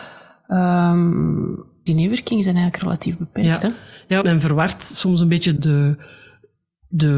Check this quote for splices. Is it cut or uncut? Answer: cut